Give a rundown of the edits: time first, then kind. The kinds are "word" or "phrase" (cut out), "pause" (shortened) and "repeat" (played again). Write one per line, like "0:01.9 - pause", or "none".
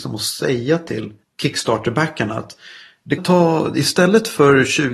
0:03.2 - word

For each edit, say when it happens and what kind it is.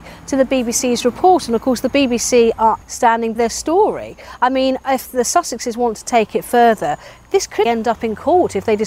0:02.8 - word
0:03.4 - word
0:07.7 - word

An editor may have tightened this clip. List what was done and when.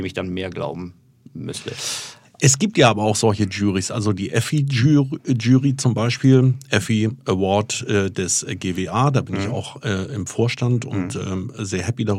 none

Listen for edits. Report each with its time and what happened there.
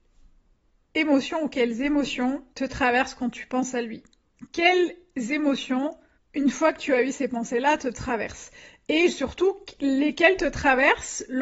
0:02.5 - pause
0:06.1 - pause

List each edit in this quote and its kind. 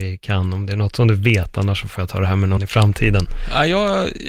0:02.6 - word

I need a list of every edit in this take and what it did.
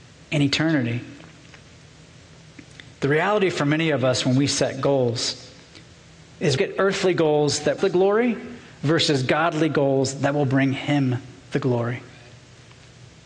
0:02.9 - pause
0:06.6 - phrase
0:07.8 - phrase
0:11.4 - pause

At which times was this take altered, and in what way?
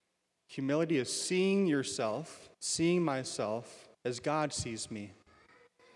0:02.5 - pause
0:03.9 - pause

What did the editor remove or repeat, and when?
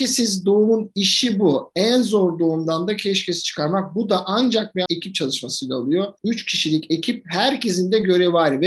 0:04.9 - word

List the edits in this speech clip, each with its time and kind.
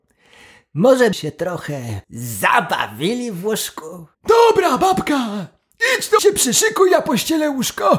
0:01.1 - word
0:02.0 - pause
0:04.1 - pause
0:06.2 - word

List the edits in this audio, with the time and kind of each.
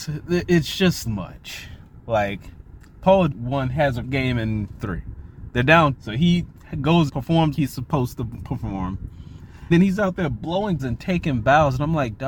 0:01.1 - word
0:03.3 - word
0:04.0 - word
0:04.8 - word
0:05.9 - word
0:07.1 - word
0:07.5 - word
0:09.7 - word
0:10.8 - word

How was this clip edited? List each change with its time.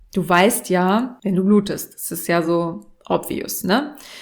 none

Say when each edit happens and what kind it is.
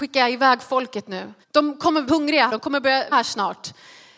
0:01.4 - pause
0:02.1 - word
0:02.5 - word
0:03.1 - word

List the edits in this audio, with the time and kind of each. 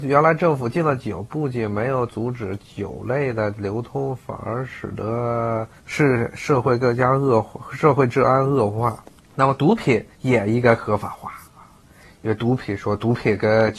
0:05.8 - pause
0:09.1 - pause
0:10.1 - pause
0:11.4 - pause

